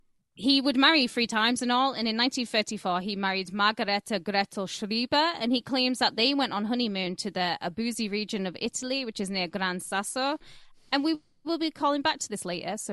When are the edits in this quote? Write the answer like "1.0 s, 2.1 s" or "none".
none

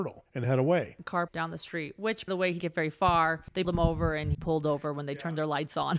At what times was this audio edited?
1.3 s, 2.3 s, 2.6 s, 3.6 s, 4.3 s

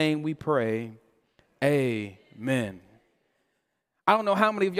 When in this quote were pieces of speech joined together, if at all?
none

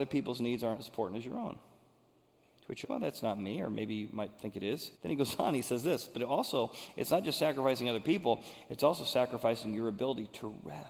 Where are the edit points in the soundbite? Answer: 2.8 s, 5.0 s

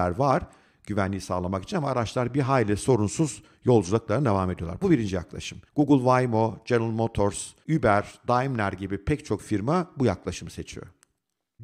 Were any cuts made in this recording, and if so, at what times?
5.7 s, 7.6 s

